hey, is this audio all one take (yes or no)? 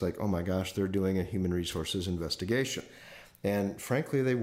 yes